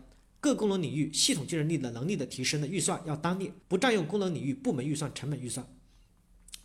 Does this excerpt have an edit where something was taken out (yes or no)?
yes